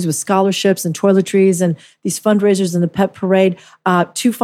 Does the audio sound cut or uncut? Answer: uncut